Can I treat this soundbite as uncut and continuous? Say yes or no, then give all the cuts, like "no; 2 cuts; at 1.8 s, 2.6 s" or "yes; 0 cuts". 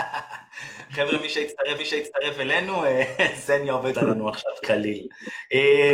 no; 3 cuts; at 1.8 s, 3.9 s, 4.6 s